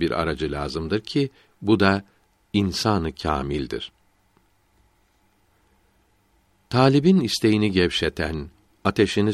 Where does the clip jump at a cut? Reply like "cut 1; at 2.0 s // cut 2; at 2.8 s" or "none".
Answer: none